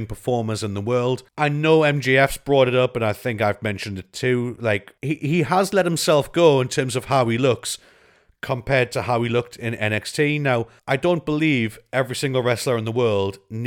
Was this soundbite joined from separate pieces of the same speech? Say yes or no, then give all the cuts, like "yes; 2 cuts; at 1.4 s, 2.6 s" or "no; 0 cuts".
yes; 3 cuts; at 1.3 s, 5.0 s, 10.8 s